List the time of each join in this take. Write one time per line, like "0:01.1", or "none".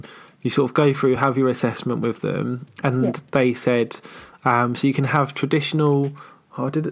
none